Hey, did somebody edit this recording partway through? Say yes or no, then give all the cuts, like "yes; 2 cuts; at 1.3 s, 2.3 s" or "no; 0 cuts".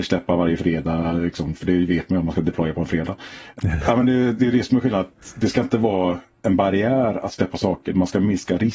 no; 0 cuts